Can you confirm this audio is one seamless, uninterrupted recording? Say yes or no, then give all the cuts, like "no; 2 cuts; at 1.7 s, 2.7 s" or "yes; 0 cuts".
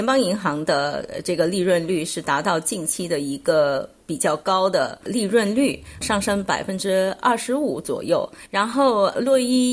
no; 1 cut; at 6.0 s